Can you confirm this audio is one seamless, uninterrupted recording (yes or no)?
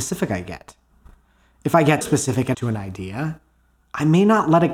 no